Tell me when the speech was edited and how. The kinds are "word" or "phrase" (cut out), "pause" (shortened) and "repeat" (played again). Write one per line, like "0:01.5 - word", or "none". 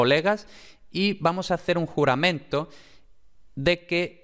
none

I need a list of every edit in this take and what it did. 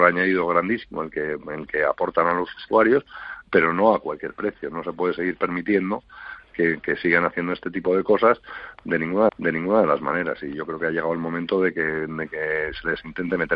0:09.3 - repeat

